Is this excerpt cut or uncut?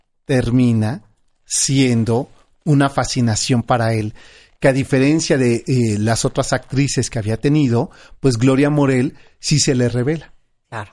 uncut